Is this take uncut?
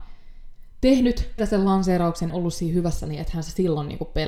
no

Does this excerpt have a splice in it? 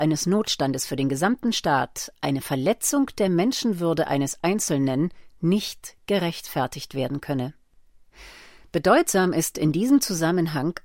no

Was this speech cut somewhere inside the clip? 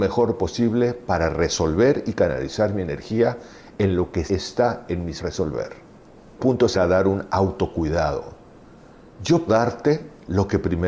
yes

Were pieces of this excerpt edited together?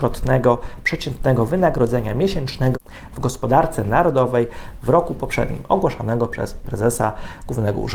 no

